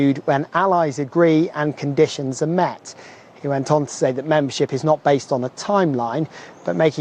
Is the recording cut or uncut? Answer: uncut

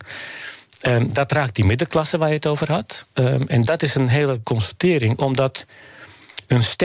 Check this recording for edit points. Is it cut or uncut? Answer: cut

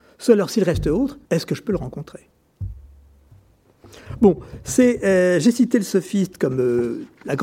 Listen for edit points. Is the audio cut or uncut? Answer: cut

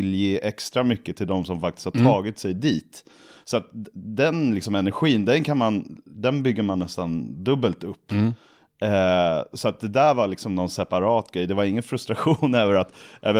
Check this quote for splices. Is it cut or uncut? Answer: uncut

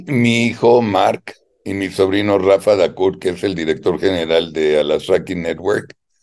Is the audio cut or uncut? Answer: uncut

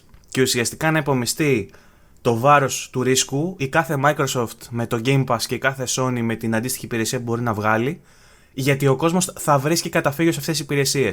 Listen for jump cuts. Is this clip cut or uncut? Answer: uncut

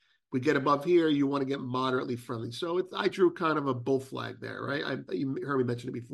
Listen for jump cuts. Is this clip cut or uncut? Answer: uncut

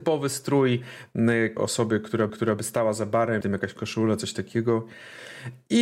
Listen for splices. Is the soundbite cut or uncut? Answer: cut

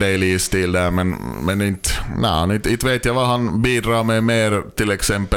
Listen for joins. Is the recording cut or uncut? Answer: uncut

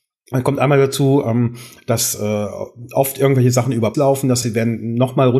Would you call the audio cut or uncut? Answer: cut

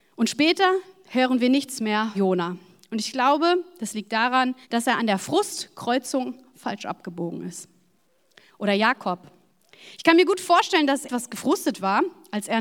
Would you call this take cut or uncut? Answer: cut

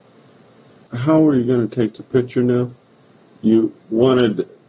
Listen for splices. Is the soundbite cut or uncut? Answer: uncut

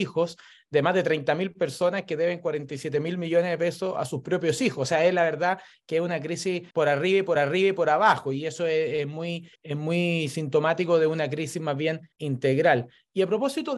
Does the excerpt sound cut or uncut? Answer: cut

